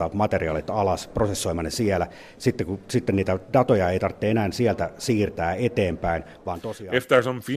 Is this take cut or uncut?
uncut